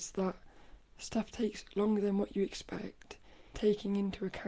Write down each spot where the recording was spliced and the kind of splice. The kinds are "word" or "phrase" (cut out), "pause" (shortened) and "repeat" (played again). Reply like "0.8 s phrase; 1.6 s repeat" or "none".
3.5 s word